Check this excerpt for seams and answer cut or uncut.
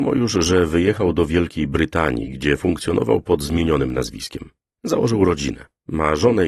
uncut